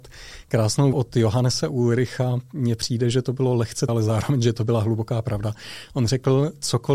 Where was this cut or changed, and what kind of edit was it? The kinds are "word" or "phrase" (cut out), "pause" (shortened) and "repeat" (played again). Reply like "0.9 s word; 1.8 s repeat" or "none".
0.9 s word; 3.9 s word